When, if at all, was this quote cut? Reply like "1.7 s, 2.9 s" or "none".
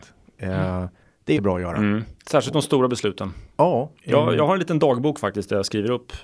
1.0 s, 1.4 s, 2.2 s, 4.0 s